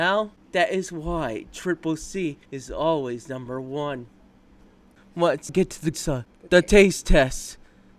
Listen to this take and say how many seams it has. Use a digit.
3